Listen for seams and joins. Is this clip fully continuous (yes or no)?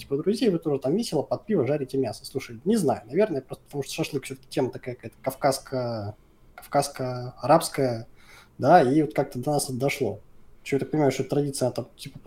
yes